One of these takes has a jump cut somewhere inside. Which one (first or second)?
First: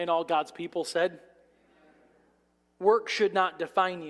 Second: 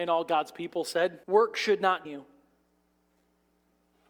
second